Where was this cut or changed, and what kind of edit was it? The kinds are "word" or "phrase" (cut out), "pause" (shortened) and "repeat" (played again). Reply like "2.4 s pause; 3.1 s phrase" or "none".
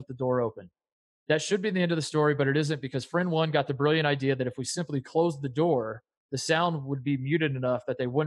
none